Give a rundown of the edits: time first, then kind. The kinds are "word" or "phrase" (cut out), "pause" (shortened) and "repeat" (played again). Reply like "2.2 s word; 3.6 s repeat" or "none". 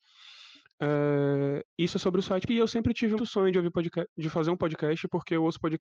1.7 s pause; 2.5 s word; 3.2 s word